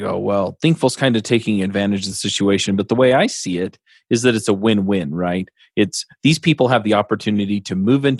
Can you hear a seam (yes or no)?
no